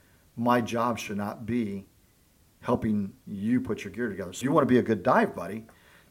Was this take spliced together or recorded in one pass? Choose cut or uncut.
cut